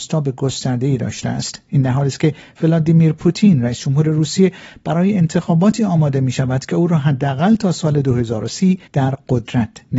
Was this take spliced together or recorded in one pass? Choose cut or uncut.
cut